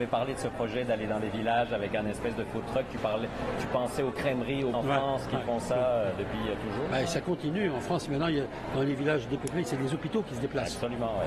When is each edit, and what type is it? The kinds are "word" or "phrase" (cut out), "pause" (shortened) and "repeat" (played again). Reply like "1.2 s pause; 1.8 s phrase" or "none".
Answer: 4.7 s word